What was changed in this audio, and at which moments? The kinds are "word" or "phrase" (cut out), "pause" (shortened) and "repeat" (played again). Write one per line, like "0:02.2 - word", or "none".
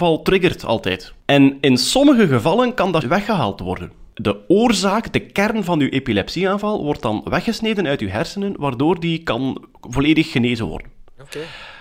0:01.2 - pause
0:03.0 - word
0:04.1 - pause

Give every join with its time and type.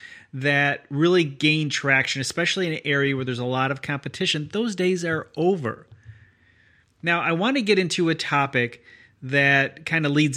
none

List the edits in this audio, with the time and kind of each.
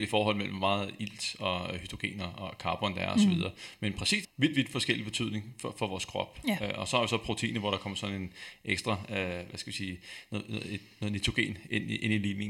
0:04.2 - phrase

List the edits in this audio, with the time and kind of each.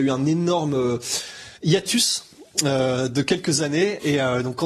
0:01.6 - pause

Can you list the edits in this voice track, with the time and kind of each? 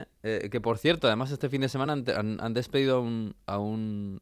none

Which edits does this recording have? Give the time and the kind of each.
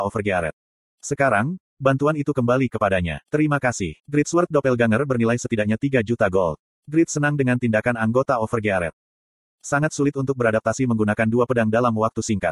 0:03.2 - pause
0:04.0 - pause

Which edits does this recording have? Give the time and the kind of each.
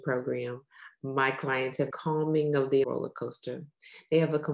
0:01.9 - phrase
0:02.8 - word

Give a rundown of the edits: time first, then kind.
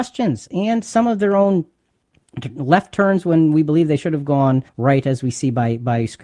0:04.7 - pause

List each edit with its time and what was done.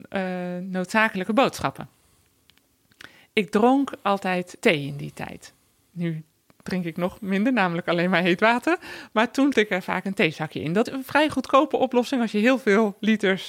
0:04.6 - word
0:09.5 - word
0:10.9 - word

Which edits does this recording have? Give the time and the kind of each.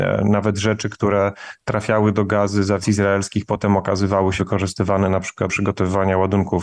0:02.8 - phrase
0:04.4 - word
0:05.5 - word

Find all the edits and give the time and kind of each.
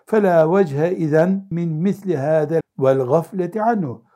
0:01.5 - word
0:02.6 - word

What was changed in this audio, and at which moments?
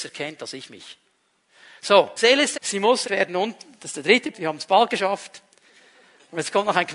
0:02.2 - word
0:02.5 - word
0:03.0 - word
0:04.3 - word

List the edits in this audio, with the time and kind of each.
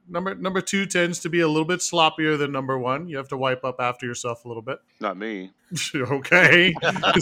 0:04.9 - pause
0:05.6 - pause

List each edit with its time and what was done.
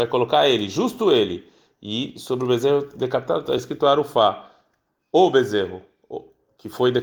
none

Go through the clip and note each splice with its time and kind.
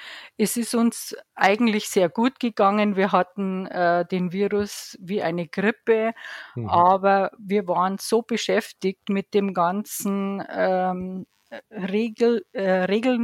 none

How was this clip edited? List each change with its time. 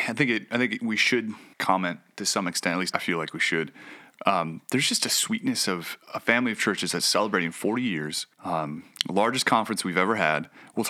0:01.5 - pause
0:02.9 - word
0:08.3 - pause

